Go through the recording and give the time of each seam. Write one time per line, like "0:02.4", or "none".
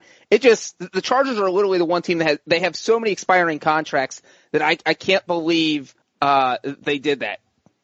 0:06.0